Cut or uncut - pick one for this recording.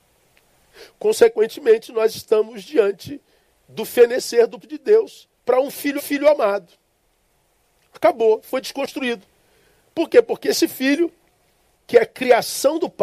cut